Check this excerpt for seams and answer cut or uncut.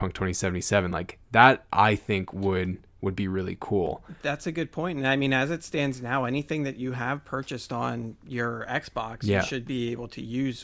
uncut